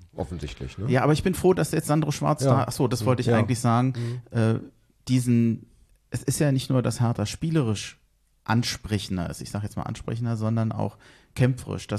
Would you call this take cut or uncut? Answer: uncut